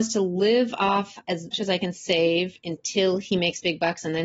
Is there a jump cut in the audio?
yes; 1 cut; at 1.5 s

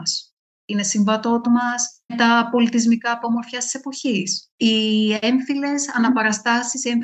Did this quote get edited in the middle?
yes; 3 cuts; at 1.4 s, 2.1 s, 3.2 s

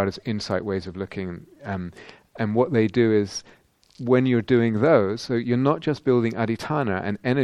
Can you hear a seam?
no; 0 cuts

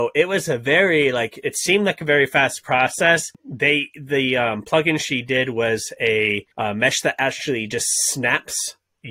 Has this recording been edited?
yes; 2 cuts; at 3.4 s, 6.5 s

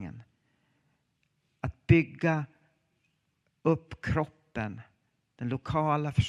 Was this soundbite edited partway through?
no; 0 cuts

